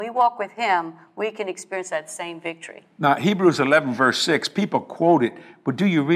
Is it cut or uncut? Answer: uncut